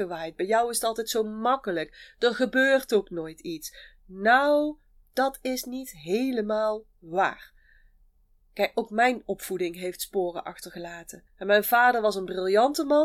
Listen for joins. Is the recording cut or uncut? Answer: cut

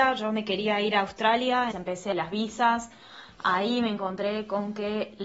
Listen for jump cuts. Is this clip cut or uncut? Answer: cut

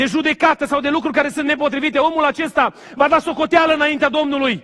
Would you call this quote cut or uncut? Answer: uncut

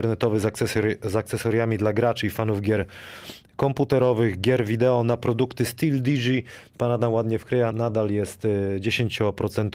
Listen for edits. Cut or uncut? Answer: cut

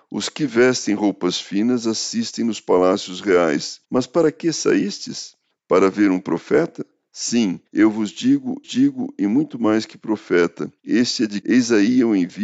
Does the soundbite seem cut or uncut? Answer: cut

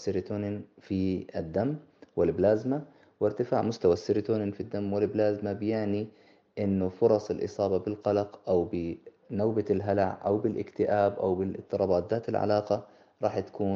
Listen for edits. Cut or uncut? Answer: uncut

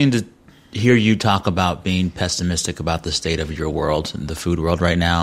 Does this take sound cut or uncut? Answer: uncut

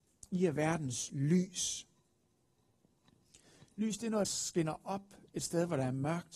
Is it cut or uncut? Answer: cut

